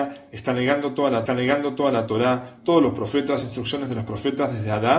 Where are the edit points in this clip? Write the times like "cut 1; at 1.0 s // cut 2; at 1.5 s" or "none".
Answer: cut 1; at 1.3 s // cut 2; at 3.4 s